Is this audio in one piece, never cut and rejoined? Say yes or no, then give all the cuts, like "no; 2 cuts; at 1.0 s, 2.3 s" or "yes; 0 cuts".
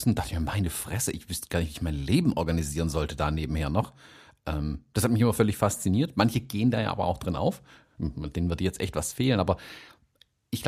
yes; 0 cuts